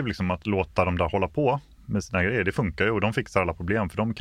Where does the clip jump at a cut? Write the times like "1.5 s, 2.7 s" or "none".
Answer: none